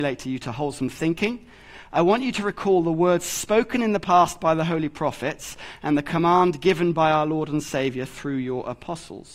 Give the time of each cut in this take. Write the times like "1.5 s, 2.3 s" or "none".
none

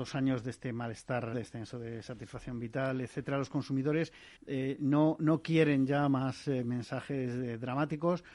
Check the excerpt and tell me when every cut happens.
1.3 s, 4.4 s

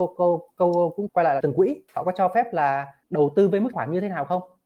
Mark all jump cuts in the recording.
1.1 s, 1.4 s, 1.9 s, 3.0 s, 3.7 s

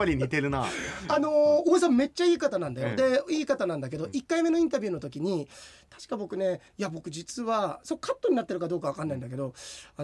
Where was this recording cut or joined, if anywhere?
6.7 s

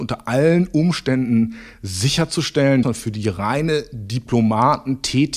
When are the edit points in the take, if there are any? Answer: 2.8 s

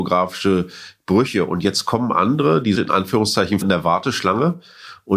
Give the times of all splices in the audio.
2.8 s, 3.6 s

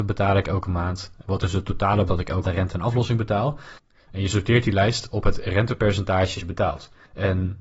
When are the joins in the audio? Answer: 1.2 s, 2.1 s, 2.4 s, 6.4 s

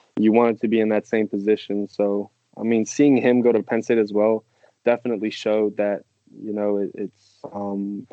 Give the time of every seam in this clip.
none

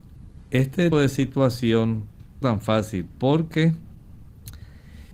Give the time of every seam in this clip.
0.9 s, 2.4 s

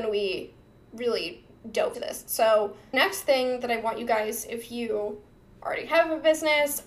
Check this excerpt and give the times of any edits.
1.9 s, 2.9 s

